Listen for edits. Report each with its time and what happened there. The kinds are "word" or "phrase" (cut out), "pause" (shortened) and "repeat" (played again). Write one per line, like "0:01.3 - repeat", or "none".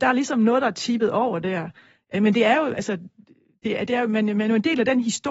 none